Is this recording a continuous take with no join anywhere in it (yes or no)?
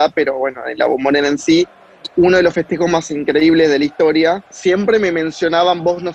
yes